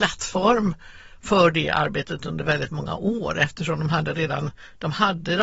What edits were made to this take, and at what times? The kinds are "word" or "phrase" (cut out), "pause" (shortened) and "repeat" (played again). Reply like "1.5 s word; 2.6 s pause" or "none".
none